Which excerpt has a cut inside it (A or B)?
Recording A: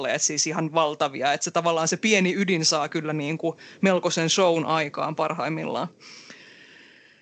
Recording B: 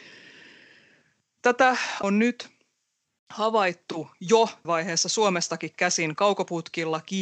B